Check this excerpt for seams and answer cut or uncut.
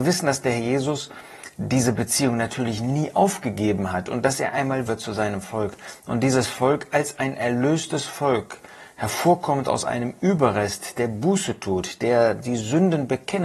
cut